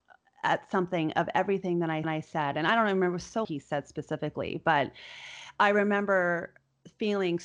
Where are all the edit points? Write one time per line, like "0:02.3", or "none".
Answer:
0:02.0
0:03.4

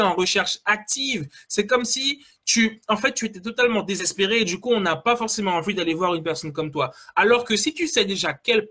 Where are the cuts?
none

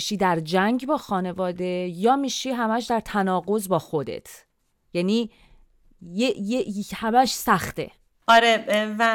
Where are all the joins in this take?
none

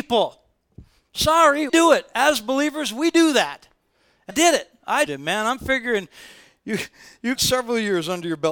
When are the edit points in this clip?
0:01.7
0:04.3
0:05.1
0:07.3

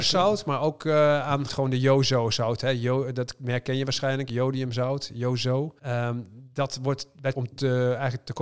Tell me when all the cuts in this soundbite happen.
0:01.5
0:05.8
0:07.3

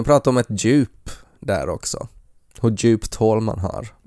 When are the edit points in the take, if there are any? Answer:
none

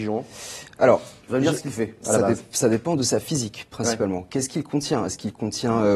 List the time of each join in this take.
0:01.6

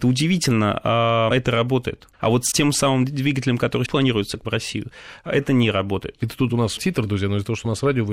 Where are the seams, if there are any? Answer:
0:01.3
0:02.5
0:03.9
0:04.4
0:06.8

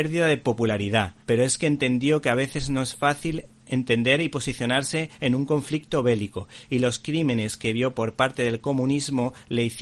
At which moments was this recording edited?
0:01.2
0:03.5

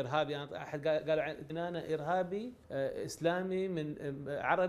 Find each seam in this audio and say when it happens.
0:01.5
0:02.6

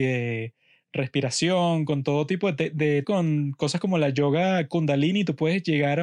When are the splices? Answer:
0:03.0

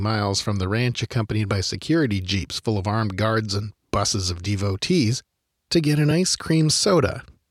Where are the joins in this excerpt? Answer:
none

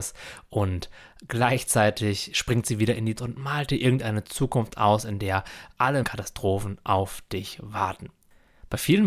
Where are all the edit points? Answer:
0:03.2
0:06.0

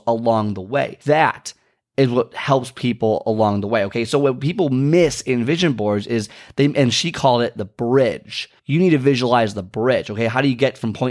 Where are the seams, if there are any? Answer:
0:01.0
0:08.6

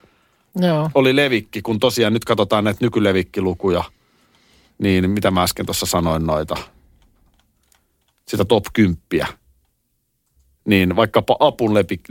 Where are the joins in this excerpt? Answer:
none

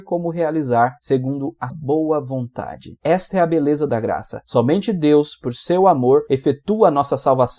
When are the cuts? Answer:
0:01.7
0:03.9

